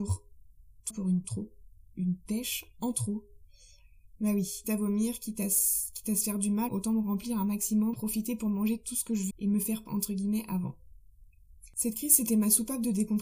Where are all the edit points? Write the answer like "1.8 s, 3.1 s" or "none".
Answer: 0.9 s, 1.2 s, 4.6 s, 6.7 s, 7.9 s, 9.3 s, 9.9 s, 11.7 s